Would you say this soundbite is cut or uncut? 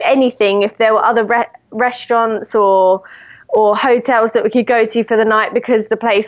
uncut